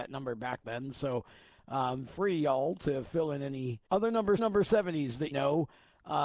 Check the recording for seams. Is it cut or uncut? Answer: cut